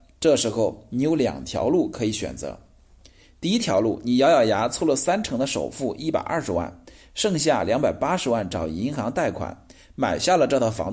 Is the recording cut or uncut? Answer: uncut